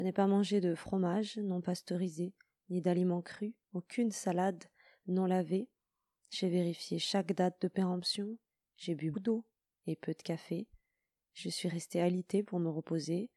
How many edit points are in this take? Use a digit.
1